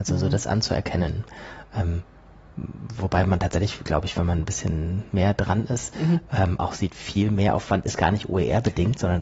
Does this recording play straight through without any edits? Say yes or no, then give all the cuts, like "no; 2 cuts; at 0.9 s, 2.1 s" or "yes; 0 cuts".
yes; 0 cuts